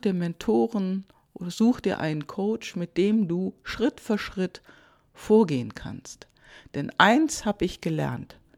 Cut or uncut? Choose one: uncut